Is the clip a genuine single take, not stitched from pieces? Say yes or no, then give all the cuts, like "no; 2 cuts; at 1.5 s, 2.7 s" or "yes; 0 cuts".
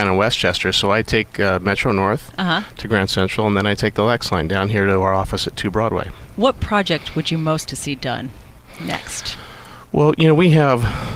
no; 1 cut; at 7.7 s